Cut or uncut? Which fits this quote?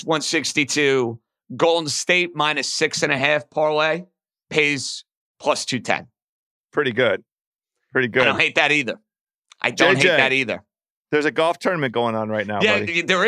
uncut